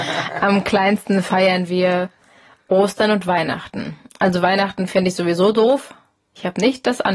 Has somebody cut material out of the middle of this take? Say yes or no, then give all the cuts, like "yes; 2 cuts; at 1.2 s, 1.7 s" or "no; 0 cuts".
no; 0 cuts